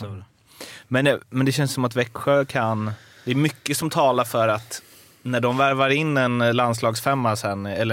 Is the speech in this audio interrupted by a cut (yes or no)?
no